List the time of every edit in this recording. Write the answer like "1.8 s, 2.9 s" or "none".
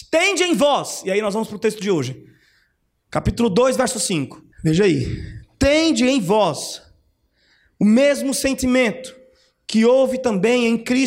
4.5 s